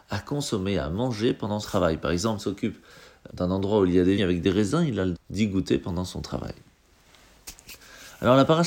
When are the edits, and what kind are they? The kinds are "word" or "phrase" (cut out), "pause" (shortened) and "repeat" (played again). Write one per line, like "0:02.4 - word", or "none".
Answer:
0:01.6 - word
0:02.4 - word
0:03.3 - word
0:04.2 - word
0:05.1 - word